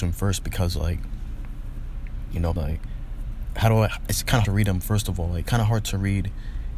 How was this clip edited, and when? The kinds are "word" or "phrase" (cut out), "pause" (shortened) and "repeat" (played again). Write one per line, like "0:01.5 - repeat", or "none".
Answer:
0:02.6 - word
0:04.4 - word
0:05.5 - word